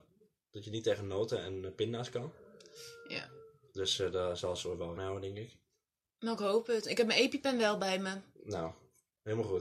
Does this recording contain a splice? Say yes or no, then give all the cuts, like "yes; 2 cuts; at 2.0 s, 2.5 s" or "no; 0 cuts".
yes; 1 cut; at 5.0 s